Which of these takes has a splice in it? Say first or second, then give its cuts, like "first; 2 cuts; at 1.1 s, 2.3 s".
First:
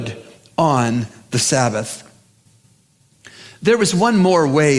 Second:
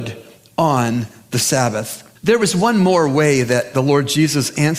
second; 1 cut; at 2.2 s